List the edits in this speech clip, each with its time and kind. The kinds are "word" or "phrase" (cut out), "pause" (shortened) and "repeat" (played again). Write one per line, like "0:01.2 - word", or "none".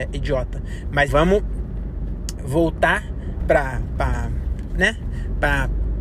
0:01.1 - word
0:02.4 - word
0:03.4 - word

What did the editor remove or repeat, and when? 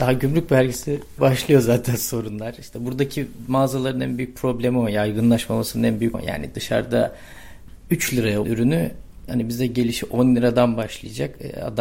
0:01.2 - word
0:06.1 - word
0:08.4 - word
0:09.3 - word

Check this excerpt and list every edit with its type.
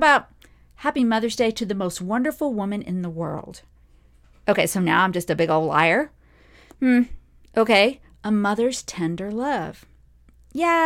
none

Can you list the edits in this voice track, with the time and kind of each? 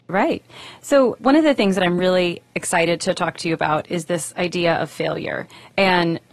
none

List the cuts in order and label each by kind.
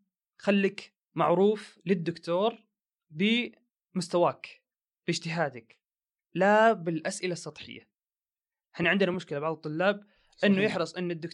none

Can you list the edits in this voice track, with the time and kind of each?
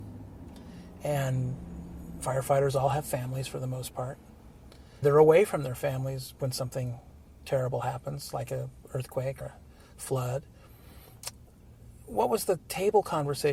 0:02.2 - word
0:05.0 - word
0:09.4 - word

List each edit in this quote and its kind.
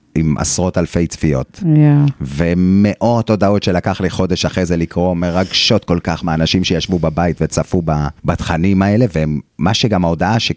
0:08.2 - pause

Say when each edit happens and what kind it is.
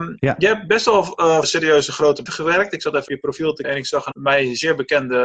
0:01.4 - word
0:02.3 - word
0:03.1 - word
0:03.6 - word
0:04.1 - word

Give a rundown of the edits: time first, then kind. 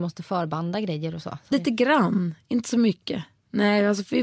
0:01.5 - word

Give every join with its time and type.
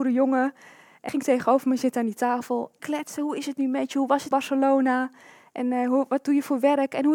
0:01.1 - word
0:02.8 - word
0:04.3 - word

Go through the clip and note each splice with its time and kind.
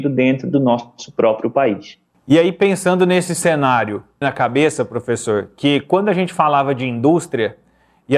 0:04.2 - phrase

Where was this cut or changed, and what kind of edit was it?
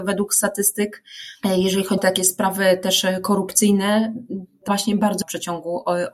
0:02.0 - word
0:04.7 - word
0:05.2 - word

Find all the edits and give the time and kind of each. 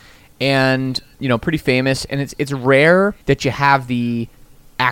0:03.2 - pause

